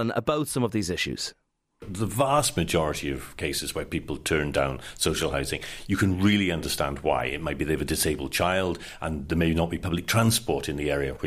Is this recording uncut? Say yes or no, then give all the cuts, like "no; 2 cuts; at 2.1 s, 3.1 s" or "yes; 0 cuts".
yes; 0 cuts